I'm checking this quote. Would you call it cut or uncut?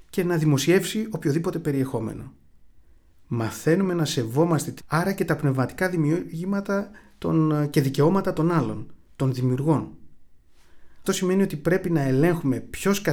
cut